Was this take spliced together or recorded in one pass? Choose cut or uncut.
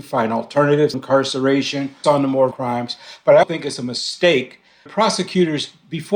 cut